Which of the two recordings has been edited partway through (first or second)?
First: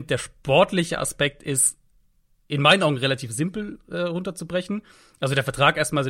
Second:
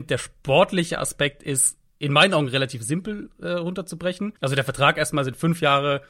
second